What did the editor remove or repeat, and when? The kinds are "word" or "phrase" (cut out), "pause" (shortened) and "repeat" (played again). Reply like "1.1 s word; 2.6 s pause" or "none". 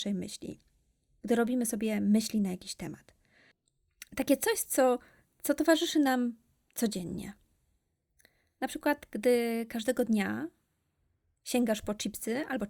none